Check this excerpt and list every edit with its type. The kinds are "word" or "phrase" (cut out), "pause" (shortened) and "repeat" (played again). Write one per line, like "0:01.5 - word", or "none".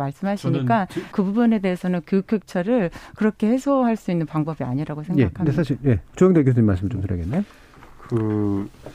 0:01.1 - word